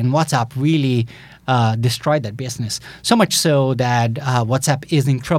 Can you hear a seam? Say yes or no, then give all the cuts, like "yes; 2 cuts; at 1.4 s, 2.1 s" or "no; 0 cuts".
no; 0 cuts